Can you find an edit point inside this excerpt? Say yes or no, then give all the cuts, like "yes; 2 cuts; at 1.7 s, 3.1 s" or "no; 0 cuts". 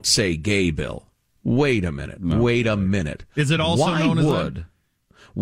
no; 0 cuts